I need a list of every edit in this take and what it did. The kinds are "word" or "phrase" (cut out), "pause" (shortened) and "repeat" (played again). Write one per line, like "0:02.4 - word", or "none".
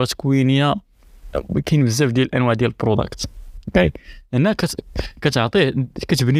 none